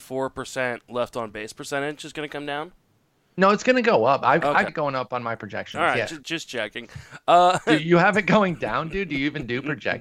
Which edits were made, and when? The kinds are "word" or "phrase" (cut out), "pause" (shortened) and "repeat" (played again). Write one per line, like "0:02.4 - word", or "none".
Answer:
0:04.7 - word
0:06.2 - word